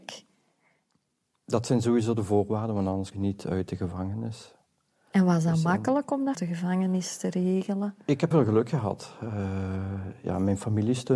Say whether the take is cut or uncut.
cut